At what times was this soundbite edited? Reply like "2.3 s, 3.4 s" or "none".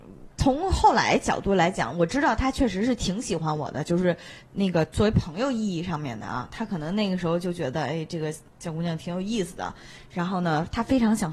none